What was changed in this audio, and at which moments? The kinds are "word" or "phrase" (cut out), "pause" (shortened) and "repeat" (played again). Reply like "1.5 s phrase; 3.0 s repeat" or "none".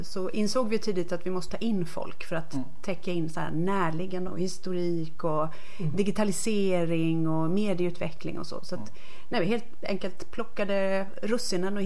1.5 s word; 4.3 s word